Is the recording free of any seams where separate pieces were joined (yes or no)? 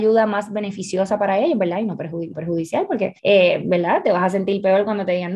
no